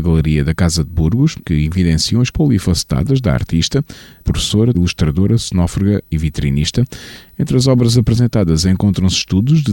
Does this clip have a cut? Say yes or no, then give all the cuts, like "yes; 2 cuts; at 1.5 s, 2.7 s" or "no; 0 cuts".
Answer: yes; 4 cuts; at 1.4 s, 2.3 s, 4.2 s, 4.7 s